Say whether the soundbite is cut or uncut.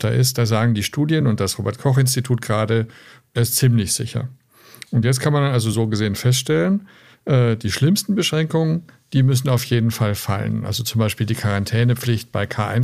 uncut